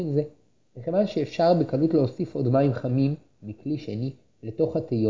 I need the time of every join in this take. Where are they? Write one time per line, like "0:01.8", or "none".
none